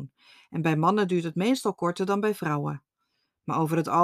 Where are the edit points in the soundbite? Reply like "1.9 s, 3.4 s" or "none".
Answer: none